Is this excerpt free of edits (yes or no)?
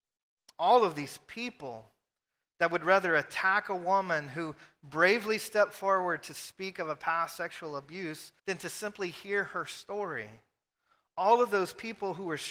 no